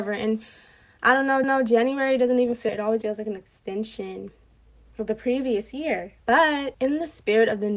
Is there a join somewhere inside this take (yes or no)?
yes